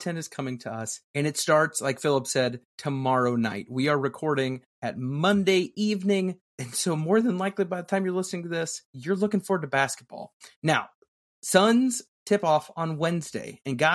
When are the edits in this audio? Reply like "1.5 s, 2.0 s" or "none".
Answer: 1.0 s, 2.7 s, 4.7 s, 6.5 s, 8.8 s, 10.5 s